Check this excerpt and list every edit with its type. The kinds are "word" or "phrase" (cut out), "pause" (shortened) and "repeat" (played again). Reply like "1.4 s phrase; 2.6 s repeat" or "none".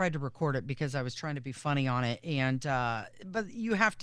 none